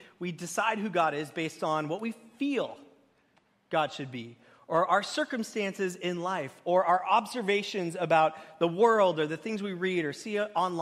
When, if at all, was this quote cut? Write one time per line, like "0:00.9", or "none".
none